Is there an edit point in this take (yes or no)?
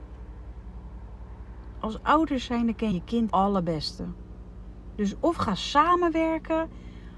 yes